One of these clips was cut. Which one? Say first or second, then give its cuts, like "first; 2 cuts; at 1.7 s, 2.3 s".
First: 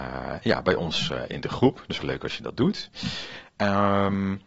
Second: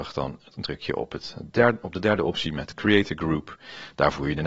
first; 1 cut; at 2.0 s